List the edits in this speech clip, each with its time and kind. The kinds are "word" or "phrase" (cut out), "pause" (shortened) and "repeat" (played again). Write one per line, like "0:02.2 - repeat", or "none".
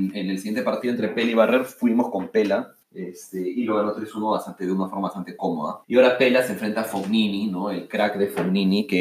0:02.8 - pause
0:05.8 - pause

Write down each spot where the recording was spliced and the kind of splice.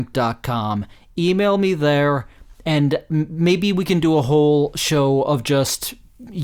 none

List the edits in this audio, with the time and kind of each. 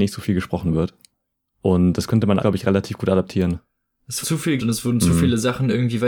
0:02.4 - word
0:04.2 - word
0:04.6 - word

